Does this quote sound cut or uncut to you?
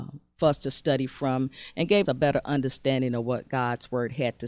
cut